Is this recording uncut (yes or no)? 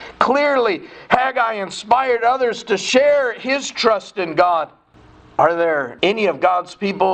yes